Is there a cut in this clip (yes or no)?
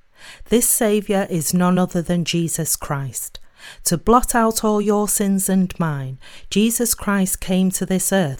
no